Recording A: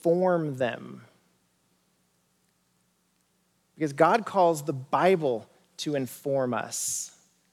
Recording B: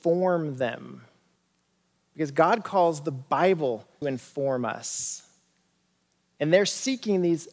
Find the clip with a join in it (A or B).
B